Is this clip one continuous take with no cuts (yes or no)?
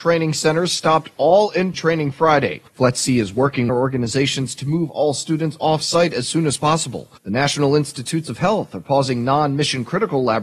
no